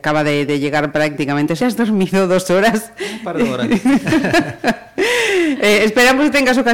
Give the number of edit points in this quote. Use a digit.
1